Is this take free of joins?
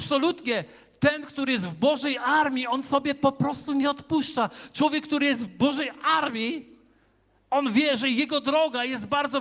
yes; 0 cuts

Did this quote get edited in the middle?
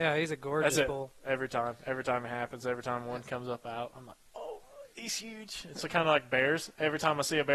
no; 0 cuts

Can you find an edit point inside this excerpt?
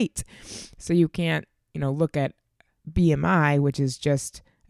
no; 0 cuts

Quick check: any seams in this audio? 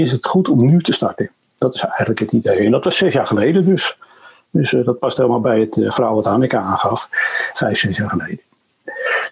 no; 0 cuts

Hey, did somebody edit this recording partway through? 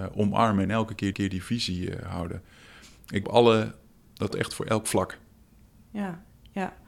yes; 3 cuts; at 1.1 s, 3.2 s, 4.3 s

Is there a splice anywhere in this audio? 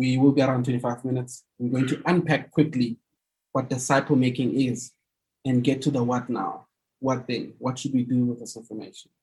no; 0 cuts

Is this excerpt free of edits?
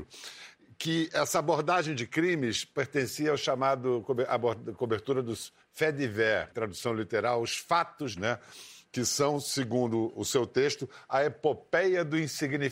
no; 2 cuts; at 6.5 s, 8.1 s

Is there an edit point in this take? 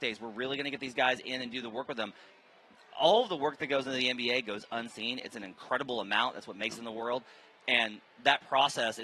yes; 1 cut; at 6.8 s

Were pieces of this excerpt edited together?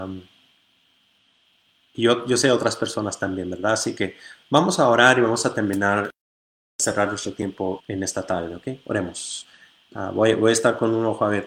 yes; 2 cuts; at 1.9 s, 7.8 s

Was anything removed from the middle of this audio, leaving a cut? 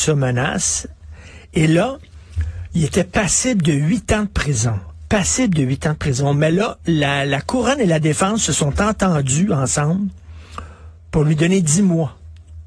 no; 0 cuts

